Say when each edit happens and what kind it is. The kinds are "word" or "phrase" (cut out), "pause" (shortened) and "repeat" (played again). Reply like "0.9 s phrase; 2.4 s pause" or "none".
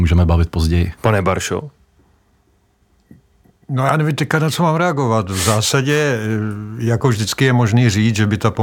1.0 s pause